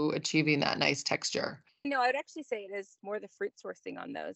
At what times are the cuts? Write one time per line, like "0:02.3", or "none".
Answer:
0:01.8